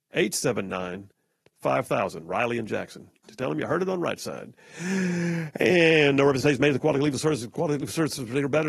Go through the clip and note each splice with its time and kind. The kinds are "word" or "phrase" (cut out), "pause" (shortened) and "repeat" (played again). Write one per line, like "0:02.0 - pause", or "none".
none